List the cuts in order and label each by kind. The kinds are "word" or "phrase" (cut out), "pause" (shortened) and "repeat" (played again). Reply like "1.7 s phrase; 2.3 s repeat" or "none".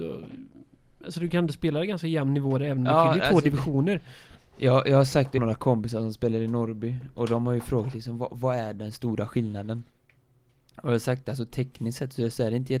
5.4 s word

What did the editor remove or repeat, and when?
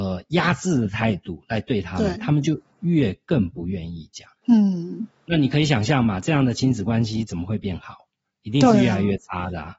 4.4 s pause

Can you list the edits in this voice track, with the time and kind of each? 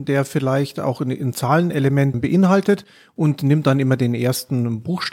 2.1 s word

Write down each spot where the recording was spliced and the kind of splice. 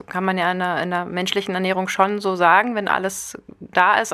none

